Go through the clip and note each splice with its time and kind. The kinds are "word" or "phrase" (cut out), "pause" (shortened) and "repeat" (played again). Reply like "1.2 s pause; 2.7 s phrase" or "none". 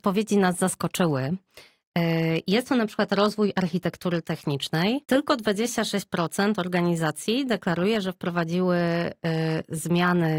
5.0 s pause